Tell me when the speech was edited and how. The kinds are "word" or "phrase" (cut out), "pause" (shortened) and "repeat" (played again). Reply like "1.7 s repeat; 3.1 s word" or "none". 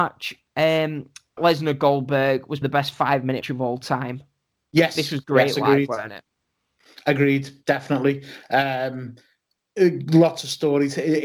1.4 s word; 2.6 s word; 3.4 s word